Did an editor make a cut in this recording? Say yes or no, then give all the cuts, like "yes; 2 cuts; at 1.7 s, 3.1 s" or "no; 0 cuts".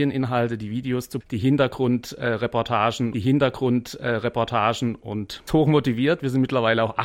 yes; 3 cuts; at 1.2 s, 3.1 s, 5.5 s